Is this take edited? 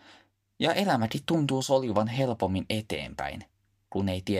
no; 0 cuts

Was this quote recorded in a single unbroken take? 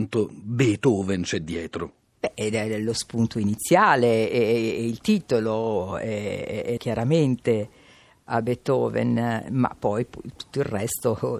no; 1 cut; at 6.8 s

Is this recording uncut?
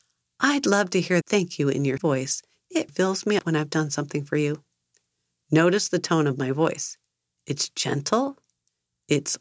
no; 4 cuts; at 1.2 s, 2.0 s, 2.9 s, 3.4 s

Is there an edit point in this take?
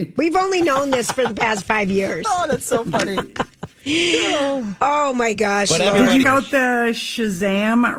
yes; 1 cut; at 6.2 s

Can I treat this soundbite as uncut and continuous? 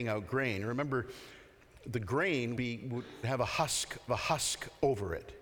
no; 3 cuts; at 2.6 s, 3.2 s, 4.1 s

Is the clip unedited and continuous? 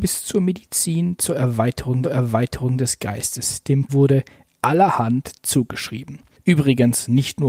no; 2 cuts; at 2.0 s, 3.9 s

